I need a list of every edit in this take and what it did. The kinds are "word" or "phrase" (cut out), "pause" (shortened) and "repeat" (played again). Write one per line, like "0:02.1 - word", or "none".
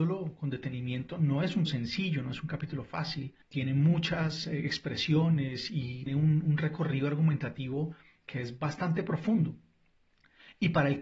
0:01.7 - word
0:03.4 - pause
0:06.1 - word